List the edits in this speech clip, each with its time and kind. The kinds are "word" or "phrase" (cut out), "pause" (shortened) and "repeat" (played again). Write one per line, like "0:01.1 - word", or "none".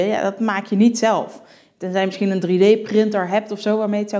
none